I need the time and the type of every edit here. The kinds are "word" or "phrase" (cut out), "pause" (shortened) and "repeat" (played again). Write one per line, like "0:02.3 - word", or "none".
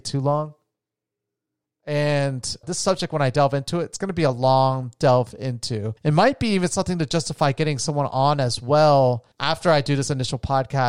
0:02.6 - word
0:06.0 - pause
0:09.3 - pause